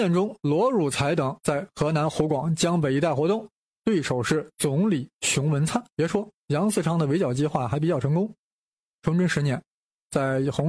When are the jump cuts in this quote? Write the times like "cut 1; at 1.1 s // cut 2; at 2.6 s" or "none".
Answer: cut 1; at 3.6 s // cut 2; at 5.9 s